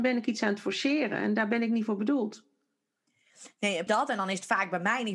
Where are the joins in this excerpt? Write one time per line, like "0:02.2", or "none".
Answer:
0:03.9